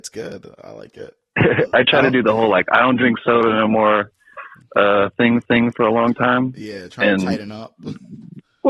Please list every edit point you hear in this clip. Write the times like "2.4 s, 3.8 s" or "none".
5.4 s